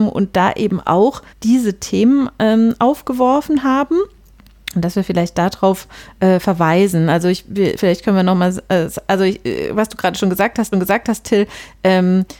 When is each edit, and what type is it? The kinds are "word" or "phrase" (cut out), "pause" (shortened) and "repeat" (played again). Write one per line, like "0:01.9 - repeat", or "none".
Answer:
0:01.3 - pause
0:10.7 - repeat